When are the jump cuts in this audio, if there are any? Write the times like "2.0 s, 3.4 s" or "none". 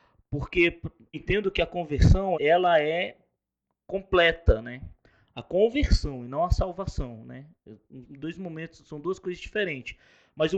1.1 s, 2.3 s, 8.0 s